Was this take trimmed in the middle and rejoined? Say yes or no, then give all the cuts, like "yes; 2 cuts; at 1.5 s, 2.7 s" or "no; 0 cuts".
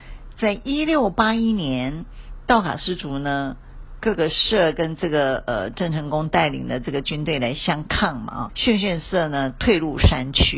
yes; 1 cut; at 8.5 s